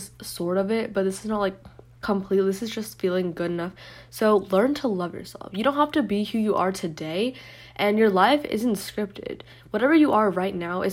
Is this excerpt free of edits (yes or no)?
yes